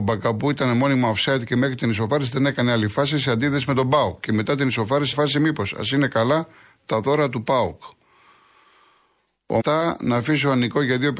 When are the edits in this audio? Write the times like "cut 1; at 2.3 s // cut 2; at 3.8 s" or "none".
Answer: cut 1; at 5.1 s // cut 2; at 9.6 s